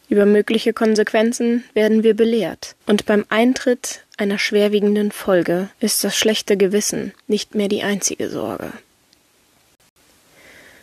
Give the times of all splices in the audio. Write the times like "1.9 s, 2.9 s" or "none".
2.8 s, 5.7 s, 7.2 s